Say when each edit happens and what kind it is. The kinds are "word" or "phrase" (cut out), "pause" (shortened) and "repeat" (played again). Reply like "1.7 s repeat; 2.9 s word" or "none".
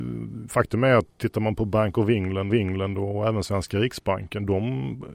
2.5 s repeat